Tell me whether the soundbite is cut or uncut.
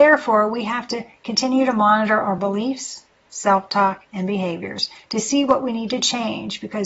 uncut